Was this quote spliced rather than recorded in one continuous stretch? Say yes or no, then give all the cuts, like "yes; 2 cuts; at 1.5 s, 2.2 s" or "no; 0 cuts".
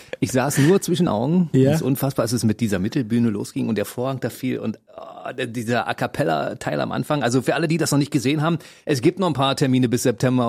yes; 1 cut; at 1.1 s